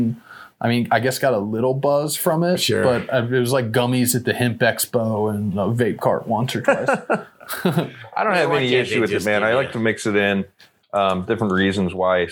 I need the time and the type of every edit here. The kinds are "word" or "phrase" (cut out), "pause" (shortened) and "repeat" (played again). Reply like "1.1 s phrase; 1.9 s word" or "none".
none